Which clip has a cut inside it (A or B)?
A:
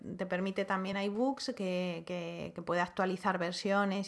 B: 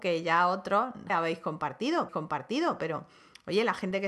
B